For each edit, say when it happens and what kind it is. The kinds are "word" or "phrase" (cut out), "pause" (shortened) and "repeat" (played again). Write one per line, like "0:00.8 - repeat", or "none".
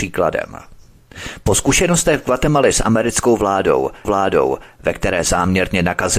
0:04.0 - repeat